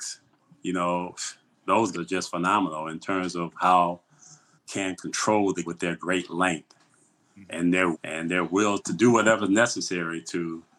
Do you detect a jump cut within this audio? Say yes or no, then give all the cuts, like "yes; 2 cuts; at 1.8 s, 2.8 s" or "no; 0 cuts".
yes; 5 cuts; at 1.9 s, 4.6 s, 5.6 s, 7.9 s, 8.8 s